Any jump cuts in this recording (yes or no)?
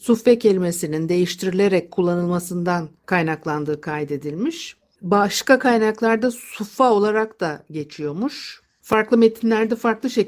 no